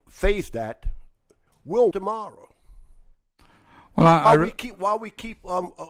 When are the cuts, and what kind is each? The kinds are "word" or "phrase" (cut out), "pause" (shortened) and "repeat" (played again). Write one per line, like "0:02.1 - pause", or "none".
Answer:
0:01.5 - word
0:01.9 - phrase